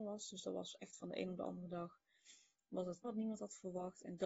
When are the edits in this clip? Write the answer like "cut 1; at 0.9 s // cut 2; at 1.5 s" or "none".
cut 1; at 3.0 s

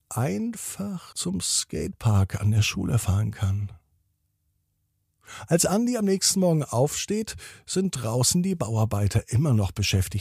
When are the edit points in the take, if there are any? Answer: cut 1; at 1.1 s

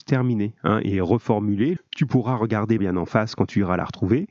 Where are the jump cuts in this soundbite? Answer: cut 1; at 1.8 s // cut 2; at 2.8 s

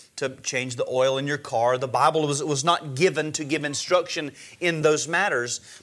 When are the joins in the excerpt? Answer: none

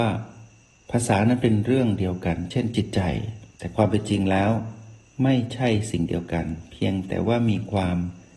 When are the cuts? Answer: none

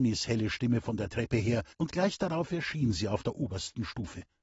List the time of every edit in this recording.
cut 1; at 1.7 s

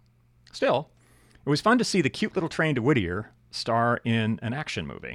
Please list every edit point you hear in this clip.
none

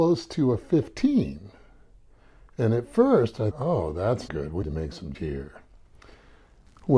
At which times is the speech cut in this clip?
cut 1; at 3.5 s // cut 2; at 4.3 s // cut 3; at 4.6 s // cut 4; at 5.1 s

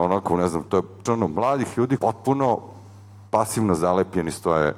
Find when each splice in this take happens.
cut 1; at 1.1 s // cut 2; at 2.0 s

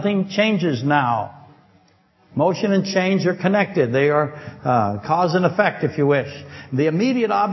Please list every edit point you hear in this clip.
none

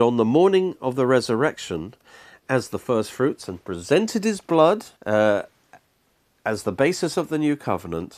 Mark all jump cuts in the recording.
cut 1; at 5.0 s

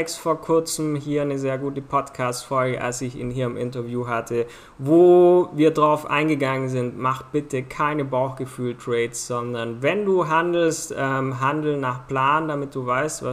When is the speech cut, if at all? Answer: none

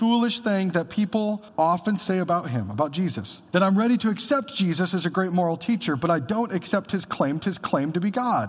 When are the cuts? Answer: cut 1; at 1.5 s // cut 2; at 3.5 s // cut 3; at 7.4 s

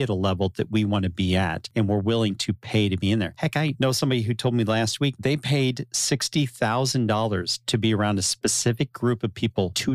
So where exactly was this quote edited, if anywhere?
none

